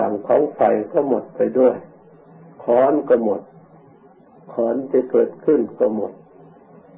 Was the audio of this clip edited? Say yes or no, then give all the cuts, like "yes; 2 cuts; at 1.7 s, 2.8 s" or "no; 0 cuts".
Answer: no; 0 cuts